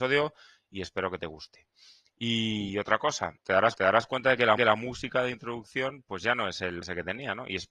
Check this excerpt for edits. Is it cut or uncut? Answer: cut